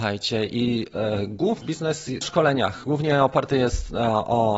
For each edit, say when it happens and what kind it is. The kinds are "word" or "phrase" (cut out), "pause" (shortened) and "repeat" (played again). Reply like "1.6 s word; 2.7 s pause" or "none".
1.6 s word; 2.2 s phrase